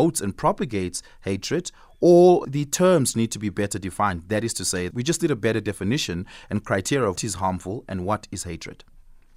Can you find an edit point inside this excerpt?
yes; 4 cuts; at 2.4 s, 3.1 s, 4.9 s, 7.2 s

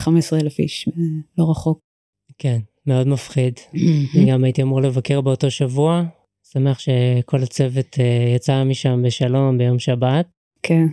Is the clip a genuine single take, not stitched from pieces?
yes; 0 cuts

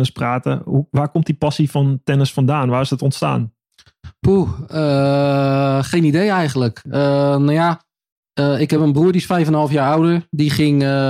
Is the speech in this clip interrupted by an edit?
no; 0 cuts

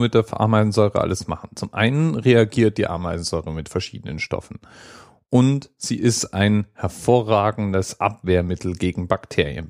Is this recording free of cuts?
yes; 0 cuts

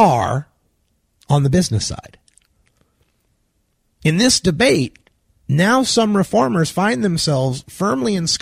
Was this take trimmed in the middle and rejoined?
no; 0 cuts

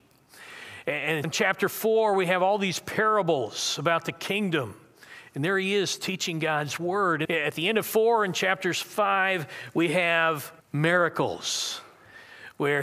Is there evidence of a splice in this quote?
yes; 3 cuts; at 1.2 s, 7.2 s, 10.6 s

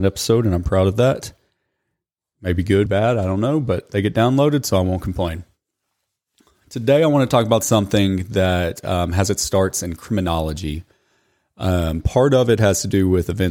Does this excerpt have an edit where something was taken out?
yes; 1 cut; at 2.9 s

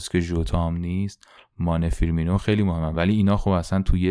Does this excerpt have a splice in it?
no; 0 cuts

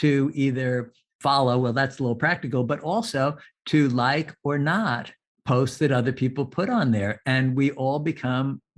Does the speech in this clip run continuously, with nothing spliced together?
yes; 0 cuts

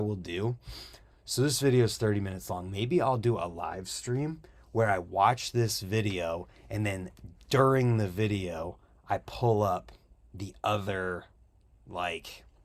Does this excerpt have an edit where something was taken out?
no; 0 cuts

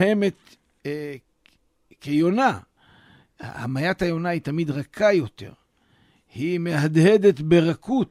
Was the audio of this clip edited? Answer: no; 0 cuts

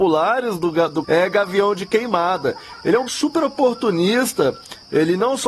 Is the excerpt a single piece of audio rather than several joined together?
no; 2 cuts; at 1.0 s, 3.1 s

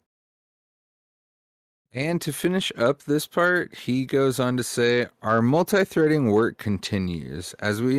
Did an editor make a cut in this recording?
no; 0 cuts

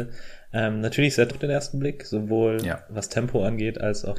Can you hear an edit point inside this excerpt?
yes; 1 cut; at 1.3 s

